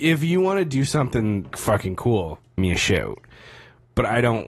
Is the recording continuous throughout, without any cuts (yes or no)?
no